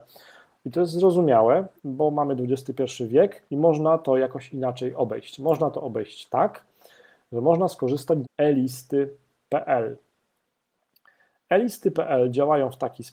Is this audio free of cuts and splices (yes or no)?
no